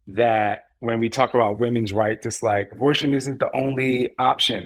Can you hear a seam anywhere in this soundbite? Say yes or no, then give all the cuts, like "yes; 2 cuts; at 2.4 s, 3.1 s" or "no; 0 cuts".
no; 0 cuts